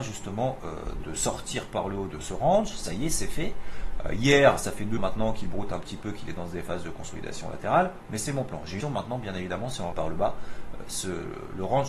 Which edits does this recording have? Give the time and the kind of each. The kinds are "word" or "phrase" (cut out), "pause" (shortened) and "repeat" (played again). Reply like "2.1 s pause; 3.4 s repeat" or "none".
1.0 s word; 5.0 s word; 8.8 s word; 9.9 s word